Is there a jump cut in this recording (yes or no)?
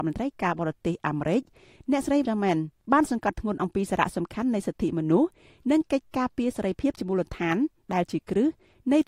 yes